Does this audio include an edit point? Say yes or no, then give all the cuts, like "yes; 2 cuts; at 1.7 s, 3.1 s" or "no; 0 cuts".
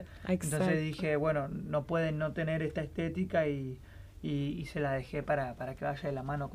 no; 0 cuts